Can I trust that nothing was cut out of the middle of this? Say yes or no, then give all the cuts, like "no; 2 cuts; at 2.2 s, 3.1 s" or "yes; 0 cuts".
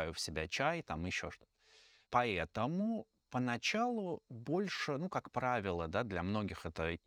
yes; 0 cuts